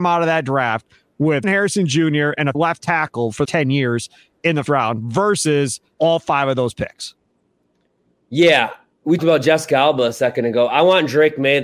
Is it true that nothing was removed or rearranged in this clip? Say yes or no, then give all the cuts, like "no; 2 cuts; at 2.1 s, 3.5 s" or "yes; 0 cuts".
no; 6 cuts; at 1.4 s, 2.5 s, 3.4 s, 4.7 s, 5.9 s, 9.2 s